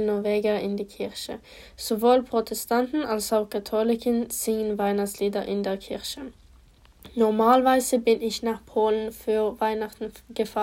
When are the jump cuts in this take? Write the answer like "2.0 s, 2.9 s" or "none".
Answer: none